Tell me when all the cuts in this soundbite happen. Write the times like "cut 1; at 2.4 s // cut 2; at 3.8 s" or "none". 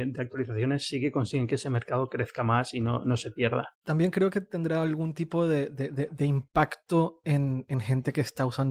cut 1; at 3.7 s